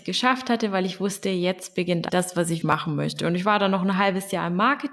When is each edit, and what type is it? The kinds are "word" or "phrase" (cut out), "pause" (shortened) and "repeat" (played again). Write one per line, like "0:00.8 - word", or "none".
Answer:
0:02.1 - word
0:02.6 - word